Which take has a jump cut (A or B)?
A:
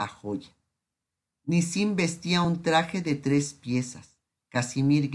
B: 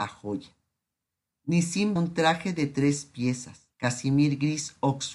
B